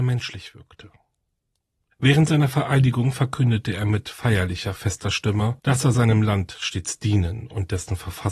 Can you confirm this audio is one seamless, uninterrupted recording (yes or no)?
yes